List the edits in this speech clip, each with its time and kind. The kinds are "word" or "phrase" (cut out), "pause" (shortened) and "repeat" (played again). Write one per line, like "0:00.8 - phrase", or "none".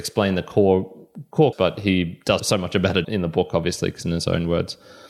0:01.5 - word
0:02.4 - word
0:03.0 - word
0:04.0 - word